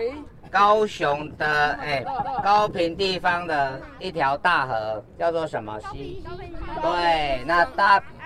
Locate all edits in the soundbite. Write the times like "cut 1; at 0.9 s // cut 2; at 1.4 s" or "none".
cut 1; at 2.2 s